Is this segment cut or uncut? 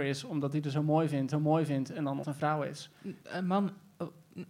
cut